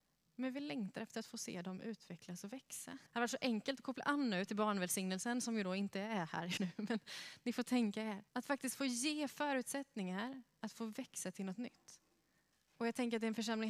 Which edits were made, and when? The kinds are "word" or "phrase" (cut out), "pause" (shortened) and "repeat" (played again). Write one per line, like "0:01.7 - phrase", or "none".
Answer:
0:03.1 - pause
0:06.6 - word
0:08.3 - pause